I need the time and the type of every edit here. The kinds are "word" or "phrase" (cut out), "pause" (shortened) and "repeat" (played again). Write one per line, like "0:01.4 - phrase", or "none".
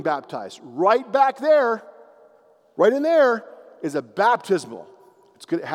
none